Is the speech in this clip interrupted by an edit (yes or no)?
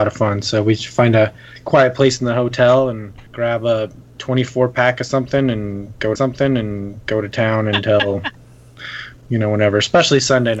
yes